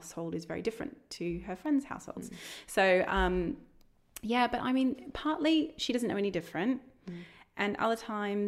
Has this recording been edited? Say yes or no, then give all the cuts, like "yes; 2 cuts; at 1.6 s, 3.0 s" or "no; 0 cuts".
no; 0 cuts